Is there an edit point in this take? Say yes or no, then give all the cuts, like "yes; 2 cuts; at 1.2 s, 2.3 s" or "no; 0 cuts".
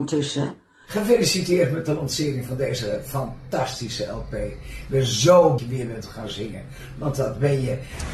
yes; 1 cut; at 5.6 s